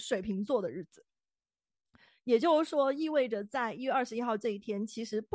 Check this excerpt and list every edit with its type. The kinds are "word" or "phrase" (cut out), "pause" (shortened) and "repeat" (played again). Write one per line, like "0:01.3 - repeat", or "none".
none